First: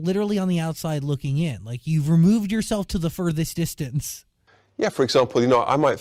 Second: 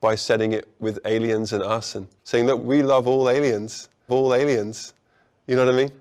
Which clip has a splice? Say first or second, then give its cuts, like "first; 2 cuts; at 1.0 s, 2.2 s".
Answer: second; 3 cuts; at 2.2 s, 2.6 s, 4.1 s